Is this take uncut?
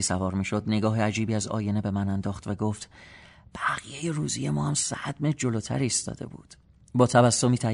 yes; 0 cuts

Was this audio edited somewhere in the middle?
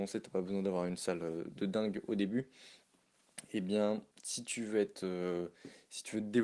yes; 1 cut; at 4.1 s

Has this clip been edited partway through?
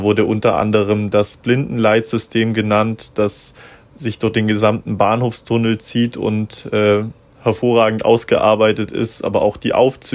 no; 0 cuts

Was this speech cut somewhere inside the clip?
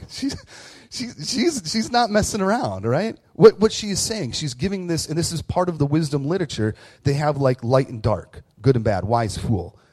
no; 0 cuts

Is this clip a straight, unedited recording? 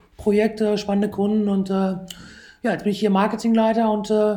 yes; 0 cuts

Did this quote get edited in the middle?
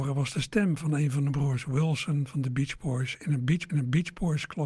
yes; 1 cut; at 3.7 s

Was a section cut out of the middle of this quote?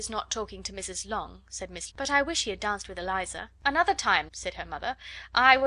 yes; 3 cuts; at 1.9 s, 3.6 s, 4.3 s

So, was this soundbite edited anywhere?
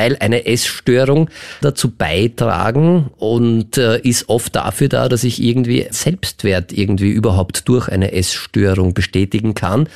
yes; 2 cuts; at 1.6 s, 5.9 s

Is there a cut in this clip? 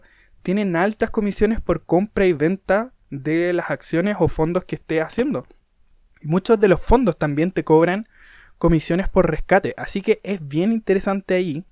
no; 0 cuts

